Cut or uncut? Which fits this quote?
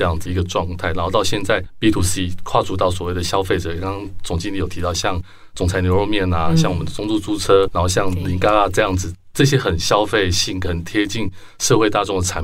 uncut